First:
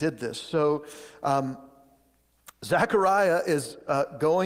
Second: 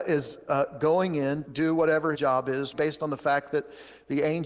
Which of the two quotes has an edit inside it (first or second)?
second